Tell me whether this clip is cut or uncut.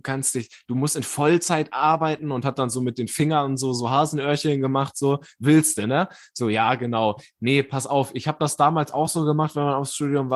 uncut